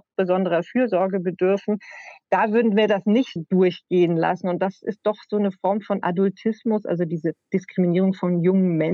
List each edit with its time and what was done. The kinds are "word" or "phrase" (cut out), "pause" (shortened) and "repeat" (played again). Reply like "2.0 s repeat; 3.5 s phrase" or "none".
3.4 s word